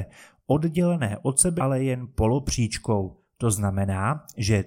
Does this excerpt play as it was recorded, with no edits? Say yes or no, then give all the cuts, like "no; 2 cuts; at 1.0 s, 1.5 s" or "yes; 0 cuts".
no; 1 cut; at 1.6 s